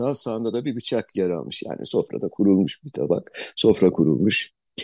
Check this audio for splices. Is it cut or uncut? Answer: uncut